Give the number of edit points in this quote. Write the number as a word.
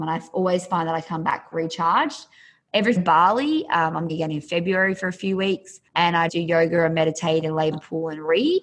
six